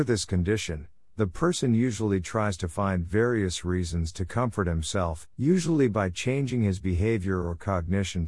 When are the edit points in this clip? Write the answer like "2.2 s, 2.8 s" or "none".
5.3 s